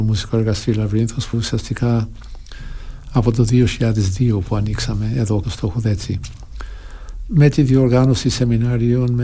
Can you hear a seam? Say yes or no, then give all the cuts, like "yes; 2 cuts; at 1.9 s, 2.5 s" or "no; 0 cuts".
yes; 2 cuts; at 1.3 s, 5.4 s